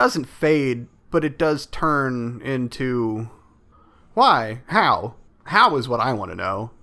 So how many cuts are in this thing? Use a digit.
0